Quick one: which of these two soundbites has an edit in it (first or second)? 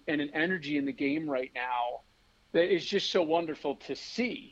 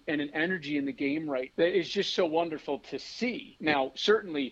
second